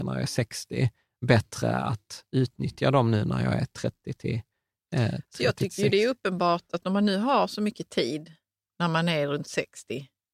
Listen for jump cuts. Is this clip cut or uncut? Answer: uncut